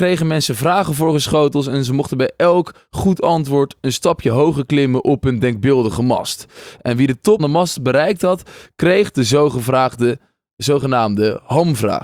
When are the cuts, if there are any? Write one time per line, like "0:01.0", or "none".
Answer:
0:07.4